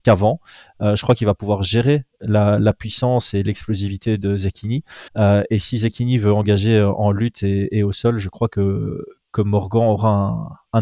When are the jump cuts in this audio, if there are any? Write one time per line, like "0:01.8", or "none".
0:05.1

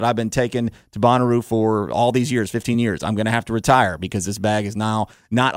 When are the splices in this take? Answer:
none

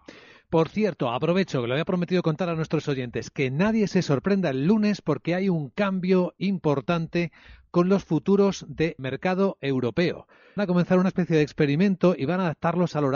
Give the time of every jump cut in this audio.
0:09.0
0:10.6

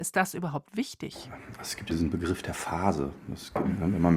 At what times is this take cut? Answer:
0:01.9

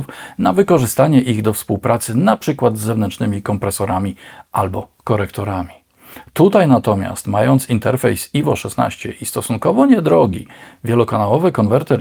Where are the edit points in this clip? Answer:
none

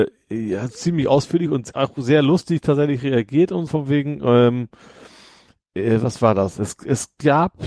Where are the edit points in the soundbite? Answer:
0:03.7

